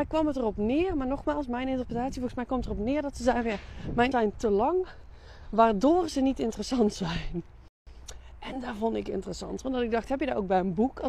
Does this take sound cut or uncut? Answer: cut